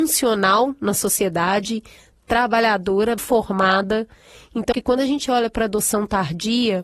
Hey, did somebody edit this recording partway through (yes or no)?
yes